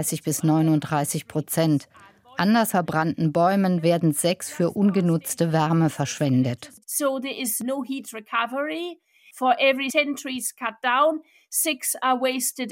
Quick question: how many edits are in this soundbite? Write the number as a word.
one